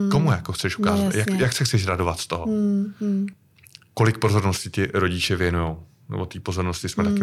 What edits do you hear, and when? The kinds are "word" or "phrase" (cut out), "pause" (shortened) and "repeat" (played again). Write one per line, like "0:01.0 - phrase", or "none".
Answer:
none